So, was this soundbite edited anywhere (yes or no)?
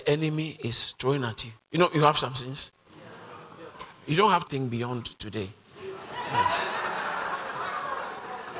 yes